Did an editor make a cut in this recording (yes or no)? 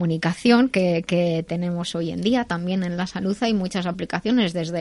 no